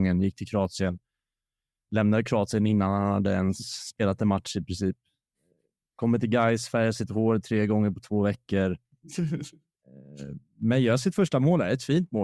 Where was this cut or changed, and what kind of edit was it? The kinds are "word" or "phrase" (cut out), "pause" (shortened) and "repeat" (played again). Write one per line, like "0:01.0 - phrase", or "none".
none